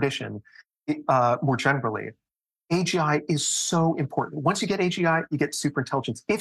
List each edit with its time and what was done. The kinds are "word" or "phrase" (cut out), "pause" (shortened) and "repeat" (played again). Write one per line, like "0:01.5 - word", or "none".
none